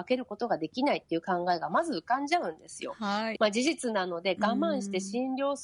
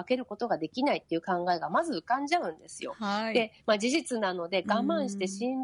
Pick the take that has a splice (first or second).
first